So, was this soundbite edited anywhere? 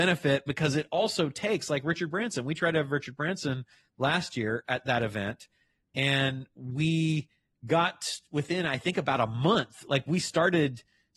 no; 0 cuts

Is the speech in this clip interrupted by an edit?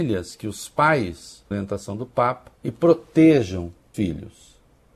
yes; 3 cuts; at 1.5 s, 2.6 s, 3.9 s

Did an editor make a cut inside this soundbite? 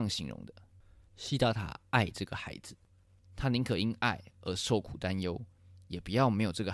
no; 0 cuts

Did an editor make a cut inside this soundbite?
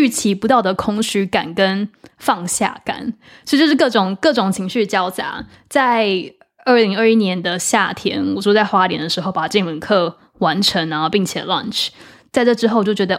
no; 0 cuts

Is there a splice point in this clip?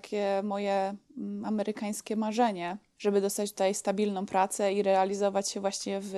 no; 0 cuts

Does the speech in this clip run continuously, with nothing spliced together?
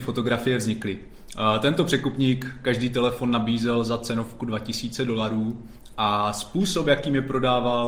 yes; 0 cuts

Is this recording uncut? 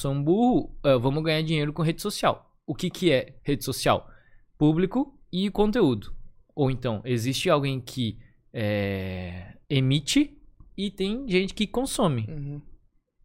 no; 3 cuts; at 3.4 s, 5.2 s, 9.6 s

